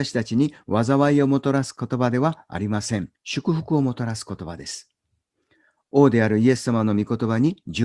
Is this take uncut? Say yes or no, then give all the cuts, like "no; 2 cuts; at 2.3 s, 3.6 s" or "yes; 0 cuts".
no; 1 cut; at 3.1 s